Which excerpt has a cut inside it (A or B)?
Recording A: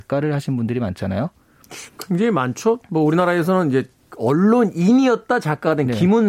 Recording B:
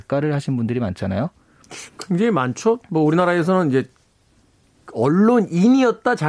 A